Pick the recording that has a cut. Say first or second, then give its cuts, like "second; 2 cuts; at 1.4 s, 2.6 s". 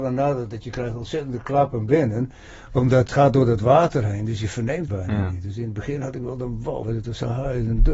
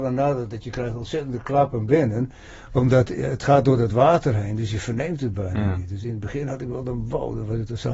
first; 3 cuts; at 3.1 s, 4.9 s, 6.8 s